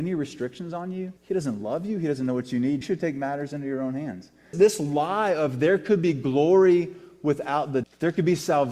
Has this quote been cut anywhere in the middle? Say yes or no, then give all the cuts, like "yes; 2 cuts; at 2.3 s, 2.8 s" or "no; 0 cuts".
yes; 4 cuts; at 1.2 s, 2.8 s, 4.5 s, 7.8 s